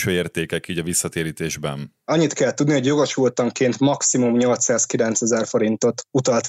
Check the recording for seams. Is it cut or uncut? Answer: uncut